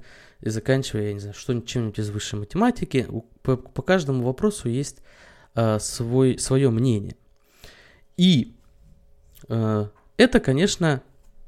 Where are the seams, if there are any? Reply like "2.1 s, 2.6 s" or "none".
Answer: none